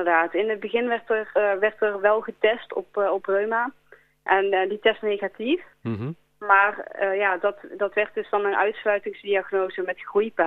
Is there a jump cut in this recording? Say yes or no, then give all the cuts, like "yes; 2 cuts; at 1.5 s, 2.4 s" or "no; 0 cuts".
yes; 1 cut; at 5.0 s